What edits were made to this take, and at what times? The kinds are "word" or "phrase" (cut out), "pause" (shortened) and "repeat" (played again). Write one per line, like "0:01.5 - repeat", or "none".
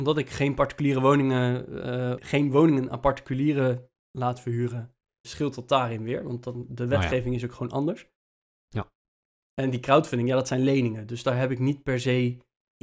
0:02.2 - word
0:05.2 - word